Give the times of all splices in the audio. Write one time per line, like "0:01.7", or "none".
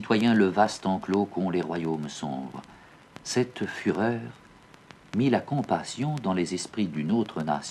none